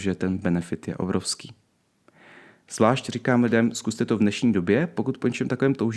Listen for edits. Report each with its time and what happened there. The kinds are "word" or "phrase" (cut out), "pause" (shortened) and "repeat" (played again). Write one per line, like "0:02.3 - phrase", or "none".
none